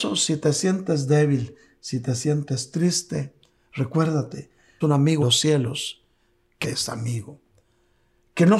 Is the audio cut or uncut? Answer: cut